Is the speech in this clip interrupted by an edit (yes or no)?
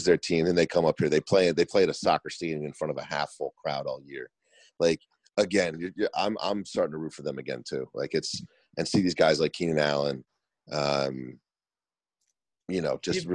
no